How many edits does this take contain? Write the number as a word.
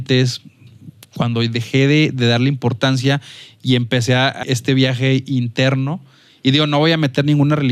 one